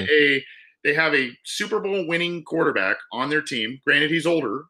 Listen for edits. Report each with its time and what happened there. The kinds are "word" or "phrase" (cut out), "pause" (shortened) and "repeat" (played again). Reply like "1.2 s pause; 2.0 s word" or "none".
none